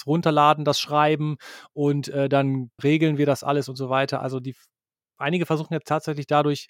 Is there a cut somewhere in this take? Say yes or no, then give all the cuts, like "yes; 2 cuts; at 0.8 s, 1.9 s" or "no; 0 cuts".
yes; 1 cut; at 2.8 s